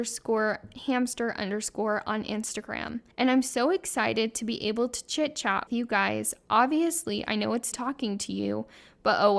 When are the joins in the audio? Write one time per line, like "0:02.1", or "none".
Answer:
0:03.1
0:05.7
0:07.7